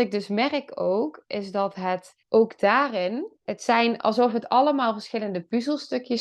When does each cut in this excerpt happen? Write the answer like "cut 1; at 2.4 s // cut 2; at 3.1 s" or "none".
cut 1; at 2.2 s // cut 2; at 3.4 s